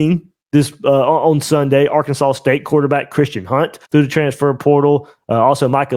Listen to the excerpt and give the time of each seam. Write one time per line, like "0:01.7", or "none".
0:03.8